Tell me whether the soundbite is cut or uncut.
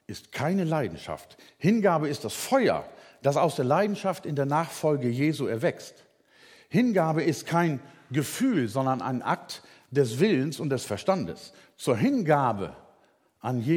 uncut